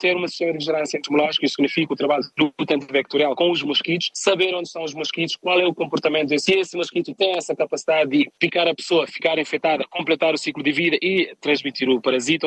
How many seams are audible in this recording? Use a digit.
2